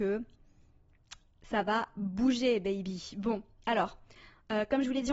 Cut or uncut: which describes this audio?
uncut